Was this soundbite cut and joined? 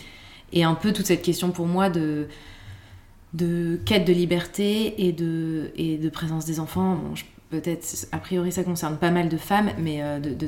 no; 0 cuts

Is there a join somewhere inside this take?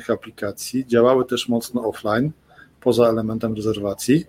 no; 0 cuts

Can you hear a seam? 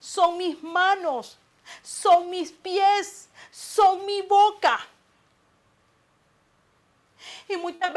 no; 0 cuts

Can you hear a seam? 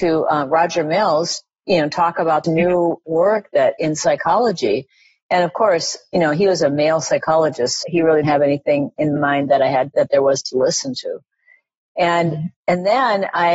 yes; 5 cuts; at 2.4 s, 7.8 s, 8.2 s, 9.2 s, 9.9 s

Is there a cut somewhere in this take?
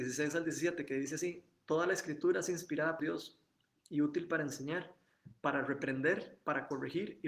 yes; 1 cut; at 3.0 s

